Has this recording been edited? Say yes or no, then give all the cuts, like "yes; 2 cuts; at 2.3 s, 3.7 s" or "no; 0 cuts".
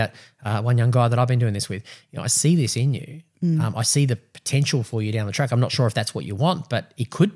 no; 0 cuts